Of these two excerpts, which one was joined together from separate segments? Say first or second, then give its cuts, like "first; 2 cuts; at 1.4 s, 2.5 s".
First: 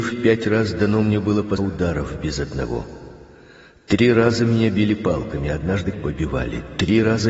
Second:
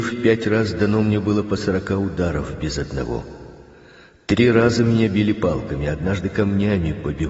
first; 2 cuts; at 1.6 s, 5.9 s